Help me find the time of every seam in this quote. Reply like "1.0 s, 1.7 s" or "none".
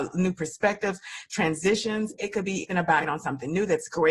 2.7 s, 3.0 s